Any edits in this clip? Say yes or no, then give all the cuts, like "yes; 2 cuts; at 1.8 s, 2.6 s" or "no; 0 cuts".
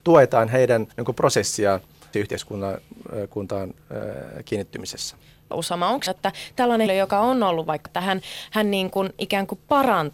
yes; 6 cuts; at 0.9 s, 2.1 s, 5.5 s, 6.1 s, 6.9 s, 7.9 s